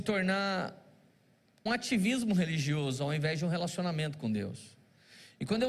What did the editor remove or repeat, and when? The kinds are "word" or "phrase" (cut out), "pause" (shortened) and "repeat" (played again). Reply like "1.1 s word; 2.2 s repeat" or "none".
1.7 s word

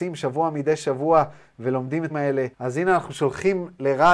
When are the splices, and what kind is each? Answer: 2.1 s word; 2.5 s pause

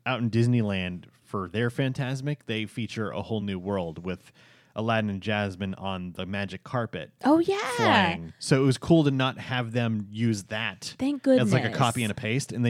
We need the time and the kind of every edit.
none

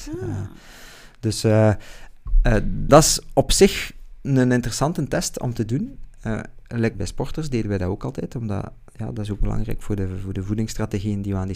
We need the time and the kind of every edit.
2.9 s word; 6.9 s word; 9.4 s word

